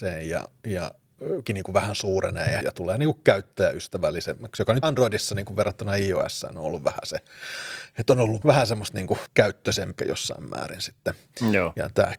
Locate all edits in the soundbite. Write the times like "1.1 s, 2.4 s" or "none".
1.5 s, 2.6 s, 4.8 s, 8.4 s, 9.3 s, 10.0 s